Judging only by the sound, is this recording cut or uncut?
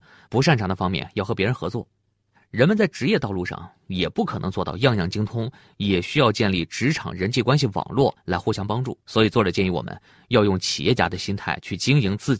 cut